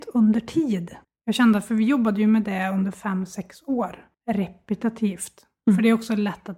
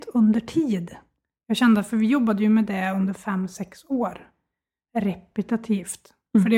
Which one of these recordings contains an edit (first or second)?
first